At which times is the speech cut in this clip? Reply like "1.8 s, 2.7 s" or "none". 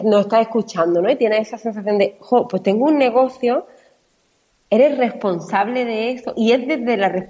none